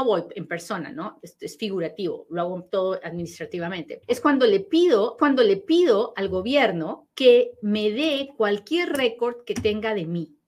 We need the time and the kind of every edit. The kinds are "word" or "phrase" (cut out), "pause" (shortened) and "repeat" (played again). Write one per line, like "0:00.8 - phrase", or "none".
0:04.0 - word
0:05.2 - repeat
0:07.1 - pause